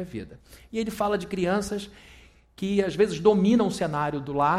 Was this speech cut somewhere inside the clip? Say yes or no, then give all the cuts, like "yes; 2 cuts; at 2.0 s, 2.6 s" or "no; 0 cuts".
no; 0 cuts